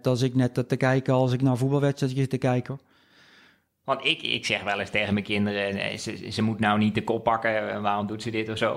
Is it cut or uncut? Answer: uncut